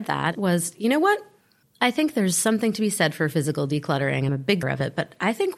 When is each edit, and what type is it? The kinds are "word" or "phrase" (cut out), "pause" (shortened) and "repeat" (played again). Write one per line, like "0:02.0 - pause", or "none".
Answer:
0:01.6 - pause
0:04.3 - word
0:04.6 - word